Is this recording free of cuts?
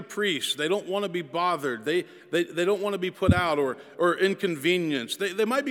yes; 0 cuts

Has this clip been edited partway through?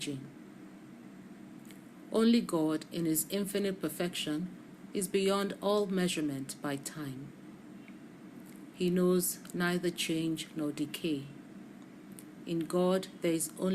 no; 0 cuts

